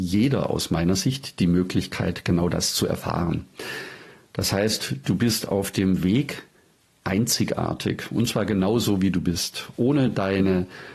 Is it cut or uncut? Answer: uncut